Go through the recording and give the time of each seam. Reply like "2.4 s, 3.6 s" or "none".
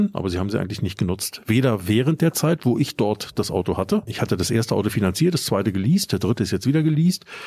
none